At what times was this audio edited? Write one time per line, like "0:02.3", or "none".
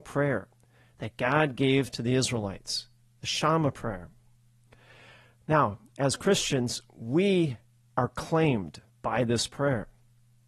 none